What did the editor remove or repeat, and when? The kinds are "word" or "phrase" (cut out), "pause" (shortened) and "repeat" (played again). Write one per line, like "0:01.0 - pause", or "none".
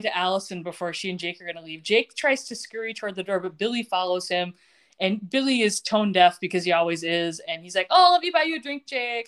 none